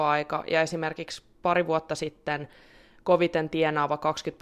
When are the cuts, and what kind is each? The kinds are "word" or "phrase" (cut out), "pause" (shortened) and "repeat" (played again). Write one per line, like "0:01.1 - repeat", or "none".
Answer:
none